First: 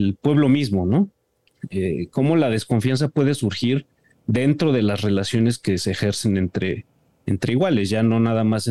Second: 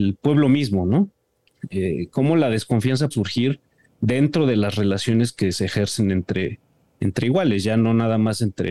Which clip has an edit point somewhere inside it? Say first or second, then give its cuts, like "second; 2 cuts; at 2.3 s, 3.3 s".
second; 1 cut; at 3.1 s